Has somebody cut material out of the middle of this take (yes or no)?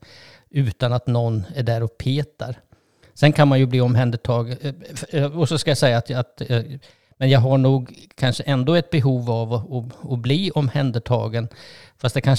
no